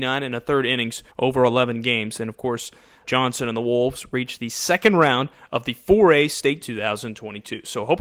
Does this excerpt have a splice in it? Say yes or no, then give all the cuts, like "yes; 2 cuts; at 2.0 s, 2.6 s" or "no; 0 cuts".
yes; 3 cuts; at 1.1 s, 3.0 s, 6.6 s